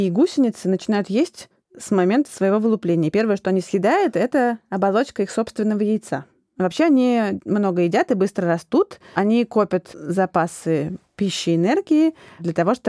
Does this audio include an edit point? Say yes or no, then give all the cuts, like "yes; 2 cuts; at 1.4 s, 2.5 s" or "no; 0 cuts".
no; 0 cuts